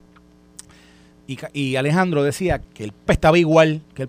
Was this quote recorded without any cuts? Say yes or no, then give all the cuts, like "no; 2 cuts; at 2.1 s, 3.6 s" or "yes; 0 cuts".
no; 2 cuts; at 2.6 s, 3.1 s